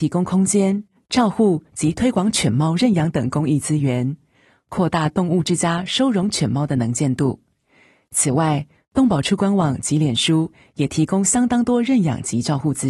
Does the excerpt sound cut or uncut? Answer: uncut